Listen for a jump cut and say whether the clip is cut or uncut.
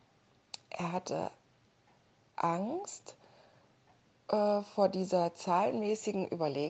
uncut